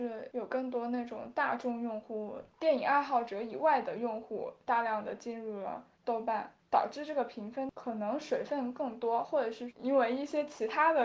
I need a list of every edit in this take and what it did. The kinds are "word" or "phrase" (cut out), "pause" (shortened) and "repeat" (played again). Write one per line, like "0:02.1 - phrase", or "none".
0:05.9 - pause